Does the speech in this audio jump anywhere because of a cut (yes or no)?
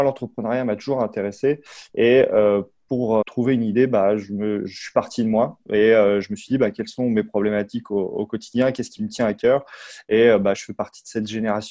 yes